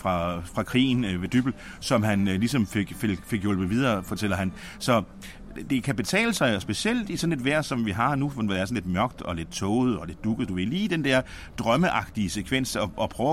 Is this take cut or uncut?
uncut